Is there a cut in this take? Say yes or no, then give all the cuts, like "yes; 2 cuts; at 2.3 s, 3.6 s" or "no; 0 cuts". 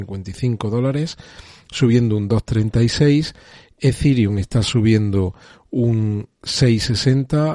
no; 0 cuts